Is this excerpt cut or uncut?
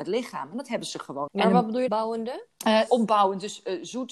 cut